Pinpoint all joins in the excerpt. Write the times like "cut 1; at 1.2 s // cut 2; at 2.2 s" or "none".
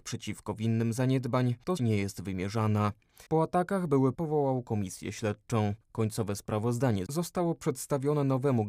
cut 1; at 1.8 s // cut 2; at 3.3 s // cut 3; at 4.1 s // cut 4; at 7.1 s